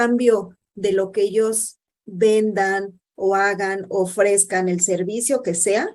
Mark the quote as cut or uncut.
cut